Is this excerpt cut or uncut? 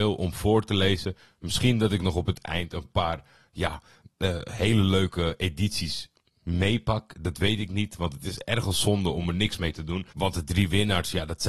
uncut